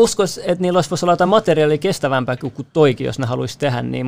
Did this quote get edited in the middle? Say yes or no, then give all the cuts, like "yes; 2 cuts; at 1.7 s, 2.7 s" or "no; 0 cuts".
no; 0 cuts